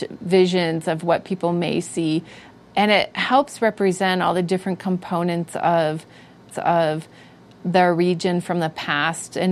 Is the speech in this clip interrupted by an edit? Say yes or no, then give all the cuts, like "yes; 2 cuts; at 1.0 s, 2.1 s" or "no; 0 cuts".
yes; 1 cut; at 6.5 s